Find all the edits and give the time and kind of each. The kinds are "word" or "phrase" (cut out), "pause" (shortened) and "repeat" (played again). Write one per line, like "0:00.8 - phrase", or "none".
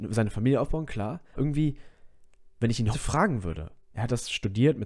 0:01.3 - word
0:02.5 - pause
0:02.9 - word
0:03.8 - pause